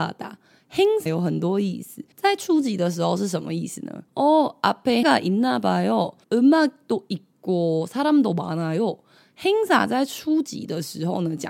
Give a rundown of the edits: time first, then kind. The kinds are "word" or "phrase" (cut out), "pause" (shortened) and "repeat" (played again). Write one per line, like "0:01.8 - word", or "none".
0:01.1 - word
0:02.1 - pause
0:04.1 - pause
0:05.0 - word
0:06.2 - pause